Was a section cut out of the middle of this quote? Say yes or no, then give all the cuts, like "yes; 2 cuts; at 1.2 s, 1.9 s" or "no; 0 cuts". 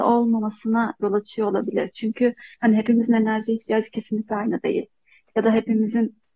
yes; 1 cut; at 2.5 s